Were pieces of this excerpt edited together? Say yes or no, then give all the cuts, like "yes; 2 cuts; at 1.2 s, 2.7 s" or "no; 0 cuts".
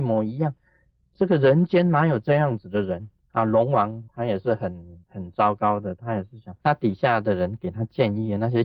yes; 4 cuts; at 3.2 s, 4.1 s, 5.0 s, 6.6 s